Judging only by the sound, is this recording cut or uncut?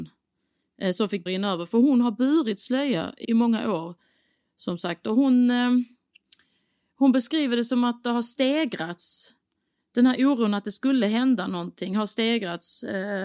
cut